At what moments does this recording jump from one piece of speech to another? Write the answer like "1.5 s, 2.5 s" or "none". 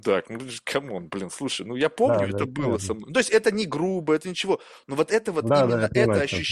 none